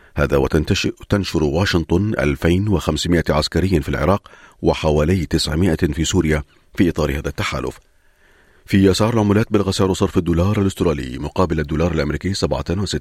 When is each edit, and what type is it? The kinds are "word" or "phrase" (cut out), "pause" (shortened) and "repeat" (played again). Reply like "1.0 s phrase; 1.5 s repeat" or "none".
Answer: none